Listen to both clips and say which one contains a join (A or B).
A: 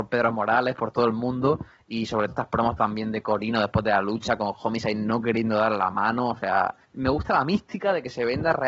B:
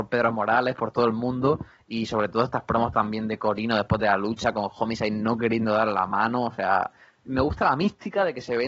A